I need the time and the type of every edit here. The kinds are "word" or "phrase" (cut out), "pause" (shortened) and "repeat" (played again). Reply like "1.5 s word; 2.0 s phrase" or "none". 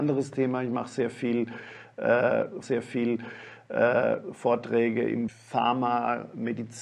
2.6 s repeat; 5.3 s word